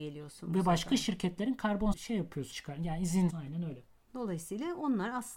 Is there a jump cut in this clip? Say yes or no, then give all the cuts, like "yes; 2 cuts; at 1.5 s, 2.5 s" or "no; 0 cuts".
yes; 3 cuts; at 1.9 s, 2.5 s, 3.3 s